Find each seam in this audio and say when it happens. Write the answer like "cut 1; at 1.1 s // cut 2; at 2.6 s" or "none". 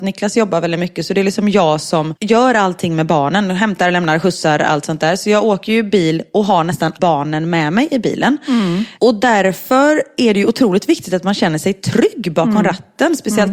cut 1; at 7.0 s